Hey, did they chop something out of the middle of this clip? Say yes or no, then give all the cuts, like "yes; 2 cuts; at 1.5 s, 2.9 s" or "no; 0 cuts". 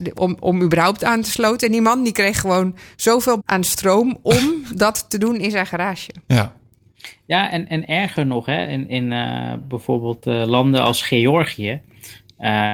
yes; 1 cut; at 3.4 s